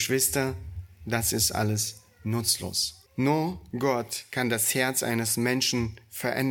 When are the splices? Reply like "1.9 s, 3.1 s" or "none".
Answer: 3.1 s